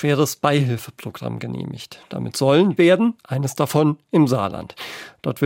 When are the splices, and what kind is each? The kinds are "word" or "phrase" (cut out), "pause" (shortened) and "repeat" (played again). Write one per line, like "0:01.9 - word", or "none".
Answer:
0:02.8 - phrase
0:03.2 - pause